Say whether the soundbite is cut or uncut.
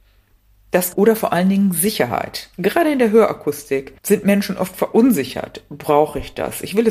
cut